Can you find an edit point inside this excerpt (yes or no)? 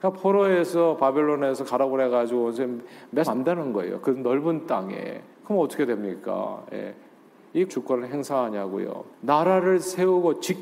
yes